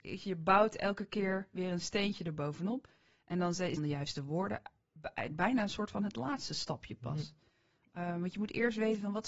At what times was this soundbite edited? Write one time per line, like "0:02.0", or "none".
0:03.8